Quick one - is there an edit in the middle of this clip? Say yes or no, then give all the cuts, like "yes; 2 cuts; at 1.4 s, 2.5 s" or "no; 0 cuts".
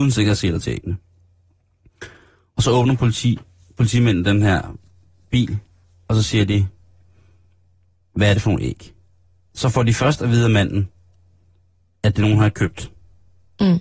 no; 0 cuts